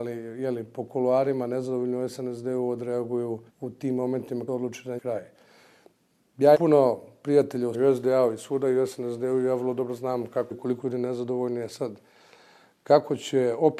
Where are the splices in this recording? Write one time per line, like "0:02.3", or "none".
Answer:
0:03.5
0:04.5
0:05.0
0:06.5
0:07.7
0:10.5
0:10.8